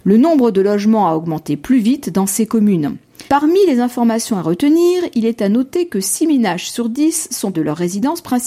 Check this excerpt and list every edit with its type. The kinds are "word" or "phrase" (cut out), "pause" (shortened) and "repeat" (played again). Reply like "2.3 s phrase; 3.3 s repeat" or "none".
3.3 s pause; 7.5 s word